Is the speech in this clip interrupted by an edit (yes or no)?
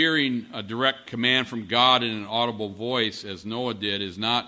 no